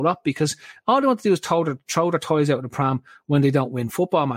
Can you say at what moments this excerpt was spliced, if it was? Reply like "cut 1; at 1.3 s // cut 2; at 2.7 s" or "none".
none